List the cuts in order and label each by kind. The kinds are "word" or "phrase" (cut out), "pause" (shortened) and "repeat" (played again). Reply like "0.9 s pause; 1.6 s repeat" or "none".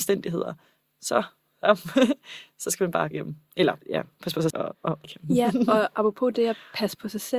3.1 s word; 3.8 s pause; 4.5 s phrase; 5.0 s word